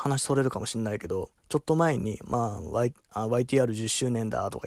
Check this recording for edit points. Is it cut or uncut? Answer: cut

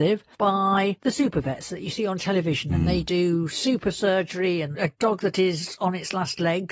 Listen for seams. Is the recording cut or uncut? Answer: uncut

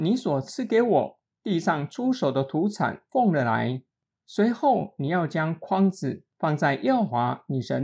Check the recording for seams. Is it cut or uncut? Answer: uncut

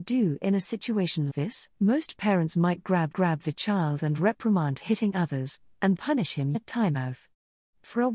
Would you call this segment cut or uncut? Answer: cut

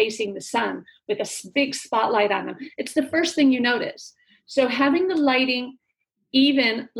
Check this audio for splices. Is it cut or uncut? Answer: uncut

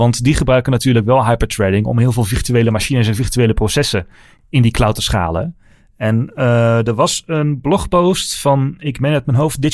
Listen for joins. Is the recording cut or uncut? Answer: uncut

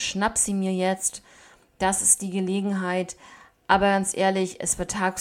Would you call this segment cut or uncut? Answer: uncut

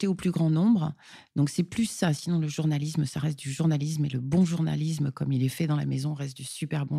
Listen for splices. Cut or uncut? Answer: uncut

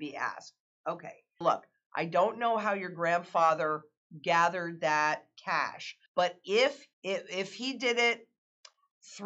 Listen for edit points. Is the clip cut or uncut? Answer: cut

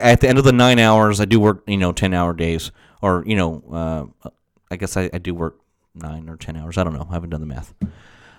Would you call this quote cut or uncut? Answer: uncut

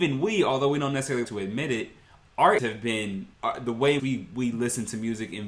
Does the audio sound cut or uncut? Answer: cut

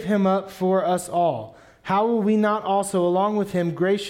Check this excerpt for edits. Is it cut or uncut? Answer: uncut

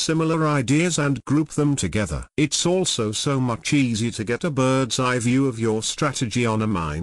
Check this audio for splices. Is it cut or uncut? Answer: uncut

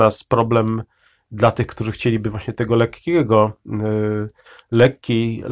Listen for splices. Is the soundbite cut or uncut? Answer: uncut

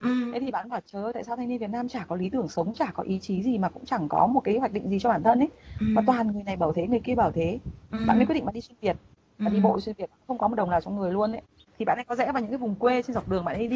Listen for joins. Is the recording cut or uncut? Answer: uncut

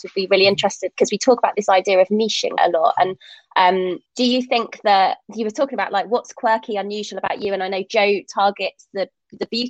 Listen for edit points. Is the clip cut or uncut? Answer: cut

